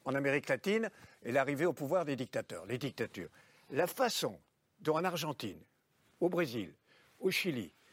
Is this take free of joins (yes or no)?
yes